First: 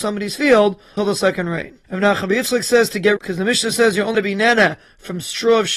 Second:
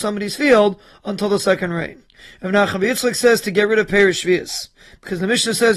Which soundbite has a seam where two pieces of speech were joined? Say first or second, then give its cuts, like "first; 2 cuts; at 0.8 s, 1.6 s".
first; 4 cuts; at 1.0 s, 1.8 s, 3.2 s, 4.1 s